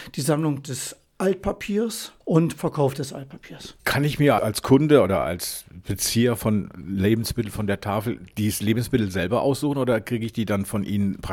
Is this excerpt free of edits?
no; 3 cuts; at 2.2 s, 3.8 s, 4.4 s

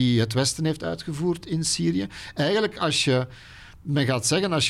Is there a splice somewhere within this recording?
no; 0 cuts

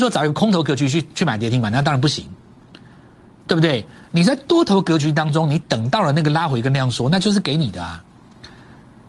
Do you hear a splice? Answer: no; 0 cuts

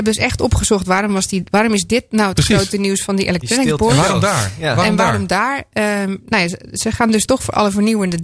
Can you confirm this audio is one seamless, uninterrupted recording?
yes; 0 cuts

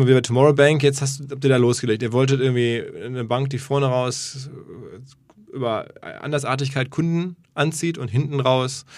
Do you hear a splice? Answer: no; 0 cuts

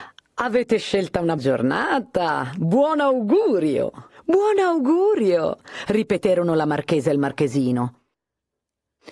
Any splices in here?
yes; 2 cuts; at 1.4 s, 4.1 s

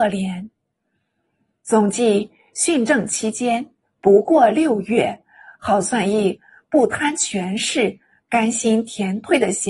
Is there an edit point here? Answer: no; 0 cuts

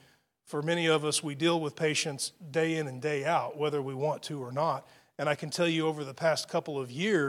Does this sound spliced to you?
no; 0 cuts

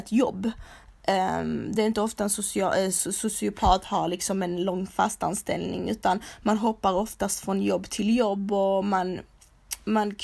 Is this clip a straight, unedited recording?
yes; 0 cuts

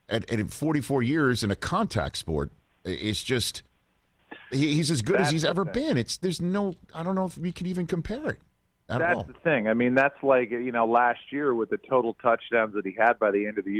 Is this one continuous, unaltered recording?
yes; 0 cuts

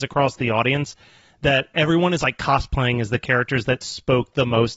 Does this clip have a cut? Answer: no; 0 cuts

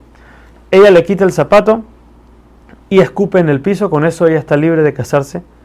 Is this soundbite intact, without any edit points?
yes; 0 cuts

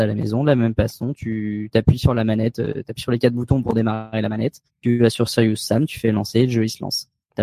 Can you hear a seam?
yes; 1 cut; at 4.7 s

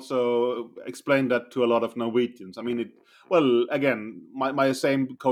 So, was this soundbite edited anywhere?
no; 0 cuts

